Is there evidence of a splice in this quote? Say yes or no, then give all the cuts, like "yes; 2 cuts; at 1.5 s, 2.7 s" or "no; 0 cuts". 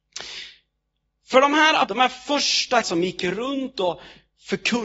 yes; 2 cuts; at 1.8 s, 2.8 s